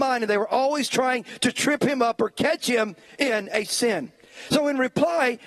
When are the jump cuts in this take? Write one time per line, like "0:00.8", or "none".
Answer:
none